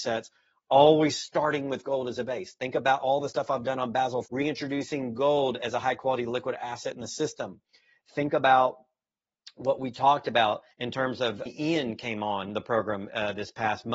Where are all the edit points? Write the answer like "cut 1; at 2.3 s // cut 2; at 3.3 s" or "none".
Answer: cut 1; at 4.3 s // cut 2; at 10.7 s // cut 3; at 11.5 s